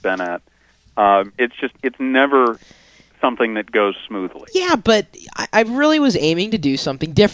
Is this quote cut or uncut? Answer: uncut